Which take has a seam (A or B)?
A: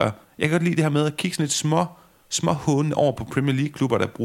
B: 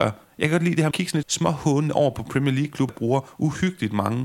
B